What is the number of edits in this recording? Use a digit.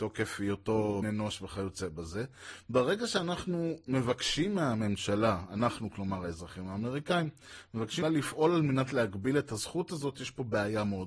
2